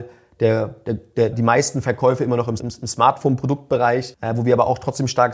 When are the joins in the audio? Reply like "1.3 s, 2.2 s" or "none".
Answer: 1.3 s, 2.6 s